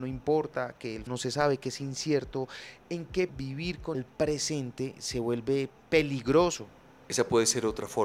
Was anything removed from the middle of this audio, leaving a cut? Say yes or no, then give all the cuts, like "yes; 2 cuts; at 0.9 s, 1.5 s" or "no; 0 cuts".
yes; 3 cuts; at 1.1 s, 3.3 s, 3.9 s